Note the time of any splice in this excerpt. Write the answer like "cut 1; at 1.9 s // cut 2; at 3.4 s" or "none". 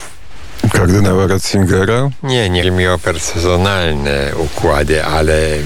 cut 1; at 2.6 s